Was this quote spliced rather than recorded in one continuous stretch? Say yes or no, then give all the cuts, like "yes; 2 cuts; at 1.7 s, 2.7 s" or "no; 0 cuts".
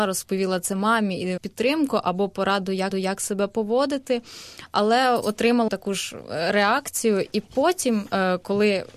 yes; 3 cuts; at 1.4 s, 2.9 s, 5.7 s